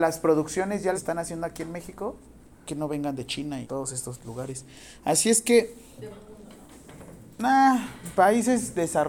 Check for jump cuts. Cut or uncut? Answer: cut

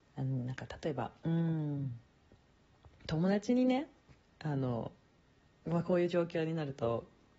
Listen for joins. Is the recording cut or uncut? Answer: uncut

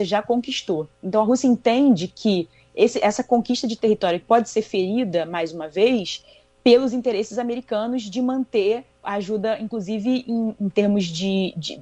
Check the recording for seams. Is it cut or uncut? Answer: cut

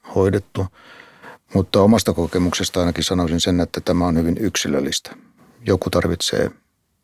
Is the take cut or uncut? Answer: uncut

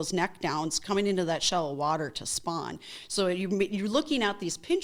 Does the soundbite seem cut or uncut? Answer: uncut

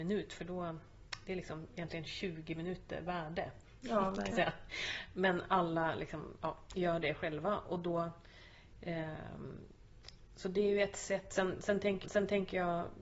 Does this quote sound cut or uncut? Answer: cut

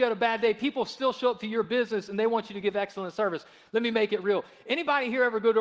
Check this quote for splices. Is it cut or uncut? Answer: uncut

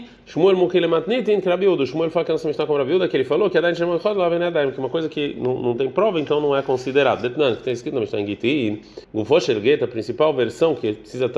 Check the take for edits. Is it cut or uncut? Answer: cut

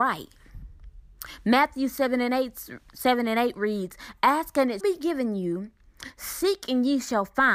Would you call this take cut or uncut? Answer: cut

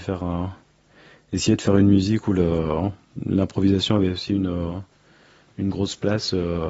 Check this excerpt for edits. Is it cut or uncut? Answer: uncut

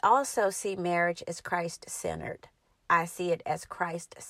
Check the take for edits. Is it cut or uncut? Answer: uncut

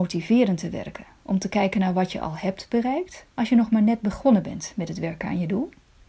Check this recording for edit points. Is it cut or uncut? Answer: uncut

